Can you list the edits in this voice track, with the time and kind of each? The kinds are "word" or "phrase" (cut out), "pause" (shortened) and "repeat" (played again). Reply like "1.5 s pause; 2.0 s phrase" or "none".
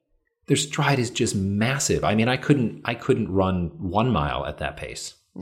none